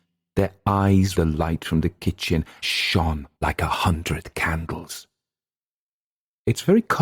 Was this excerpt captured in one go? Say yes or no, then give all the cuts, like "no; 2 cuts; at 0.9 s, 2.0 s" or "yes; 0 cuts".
no; 3 cuts; at 1.1 s, 2.6 s, 3.4 s